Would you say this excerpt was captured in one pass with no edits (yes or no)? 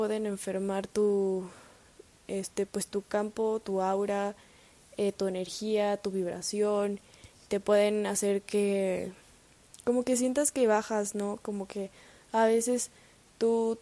yes